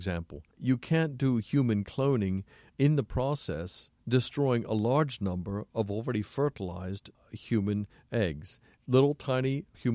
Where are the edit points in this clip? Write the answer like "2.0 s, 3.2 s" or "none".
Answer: 2.7 s

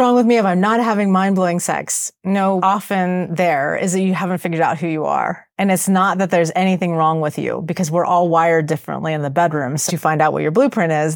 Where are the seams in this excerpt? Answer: 2.6 s, 5.5 s, 9.9 s

